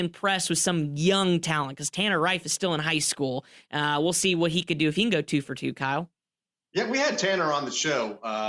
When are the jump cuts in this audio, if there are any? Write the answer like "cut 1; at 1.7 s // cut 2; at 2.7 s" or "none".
none